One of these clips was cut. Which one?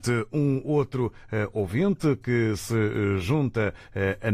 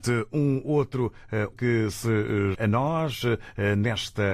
second; 2 cuts; at 1.5 s, 2.5 s

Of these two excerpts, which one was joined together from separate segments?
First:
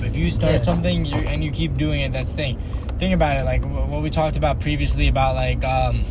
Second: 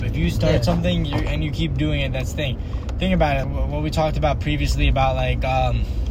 second; 1 cut; at 3.4 s

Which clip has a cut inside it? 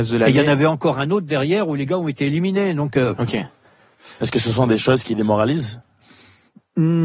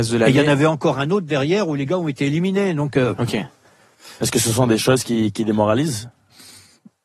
first; 1 cut; at 5.0 s

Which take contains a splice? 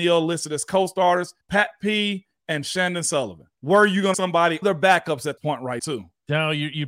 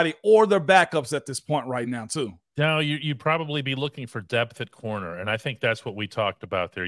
first; 6 cuts; at 1.4 s, 3.5 s, 4.1 s, 4.6 s, 5.4 s, 5.8 s

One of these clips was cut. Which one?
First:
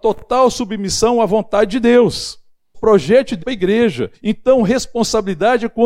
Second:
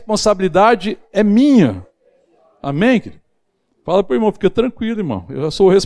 first; 3 cuts; at 2.7 s, 3.4 s, 4.1 s

